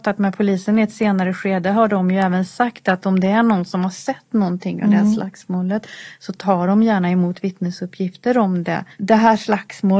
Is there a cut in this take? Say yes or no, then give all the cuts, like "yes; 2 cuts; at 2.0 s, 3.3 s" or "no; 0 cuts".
yes; 1 cut; at 8.9 s